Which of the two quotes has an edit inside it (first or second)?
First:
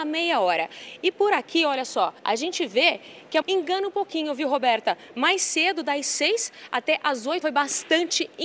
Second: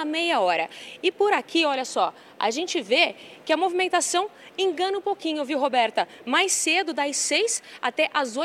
first